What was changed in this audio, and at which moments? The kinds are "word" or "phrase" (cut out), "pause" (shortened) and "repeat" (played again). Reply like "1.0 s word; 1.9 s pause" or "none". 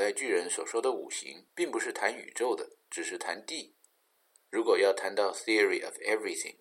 1.5 s pause